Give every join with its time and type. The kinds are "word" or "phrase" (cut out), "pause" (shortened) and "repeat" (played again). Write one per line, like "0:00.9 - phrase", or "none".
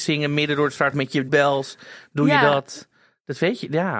0:00.9 - word
0:01.3 - word